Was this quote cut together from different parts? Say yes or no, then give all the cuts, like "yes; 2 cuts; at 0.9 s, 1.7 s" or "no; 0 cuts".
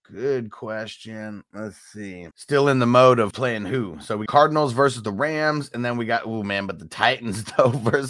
yes; 3 cuts; at 2.3 s, 3.3 s, 4.3 s